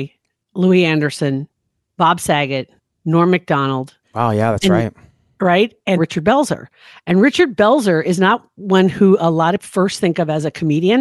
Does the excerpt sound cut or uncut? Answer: cut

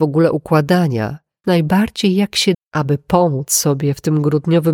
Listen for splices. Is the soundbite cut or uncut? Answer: cut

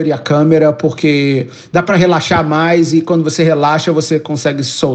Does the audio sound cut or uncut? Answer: uncut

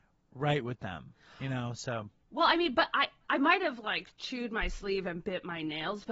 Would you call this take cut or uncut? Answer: uncut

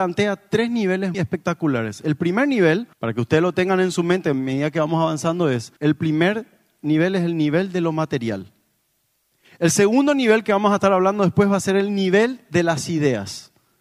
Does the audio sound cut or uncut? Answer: cut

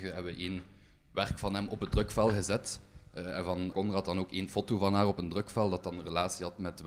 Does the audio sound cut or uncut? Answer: cut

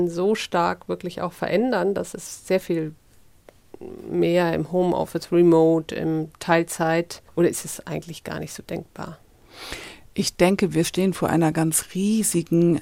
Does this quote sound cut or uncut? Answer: cut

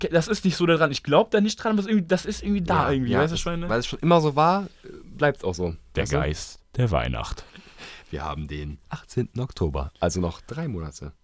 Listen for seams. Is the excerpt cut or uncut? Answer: cut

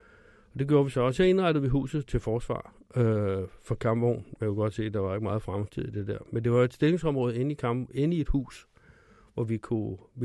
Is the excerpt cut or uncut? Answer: uncut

